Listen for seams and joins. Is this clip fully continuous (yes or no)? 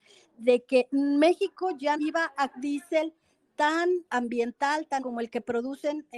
no